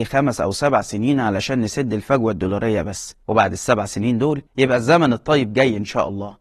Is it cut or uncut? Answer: cut